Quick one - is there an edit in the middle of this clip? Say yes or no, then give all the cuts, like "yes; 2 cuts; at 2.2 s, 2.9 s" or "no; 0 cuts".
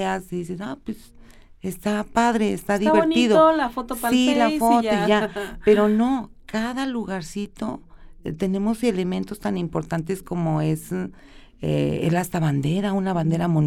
no; 0 cuts